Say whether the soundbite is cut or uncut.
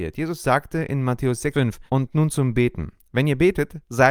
cut